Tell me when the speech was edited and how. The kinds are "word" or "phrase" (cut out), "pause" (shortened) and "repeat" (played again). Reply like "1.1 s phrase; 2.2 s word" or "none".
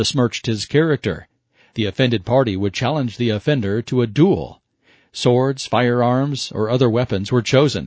none